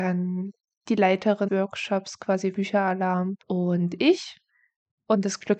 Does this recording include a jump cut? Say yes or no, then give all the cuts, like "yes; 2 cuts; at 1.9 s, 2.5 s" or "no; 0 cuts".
yes; 3 cuts; at 1.5 s, 2.5 s, 3.4 s